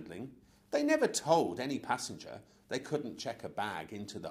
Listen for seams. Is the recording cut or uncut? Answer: uncut